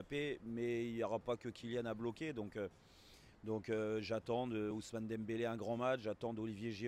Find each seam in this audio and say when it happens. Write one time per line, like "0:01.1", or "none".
none